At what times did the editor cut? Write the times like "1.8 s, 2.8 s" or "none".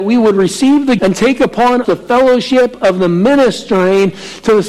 1.0 s, 1.8 s